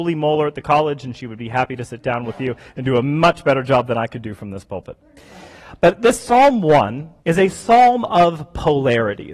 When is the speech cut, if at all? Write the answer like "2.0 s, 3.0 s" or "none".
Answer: 7.2 s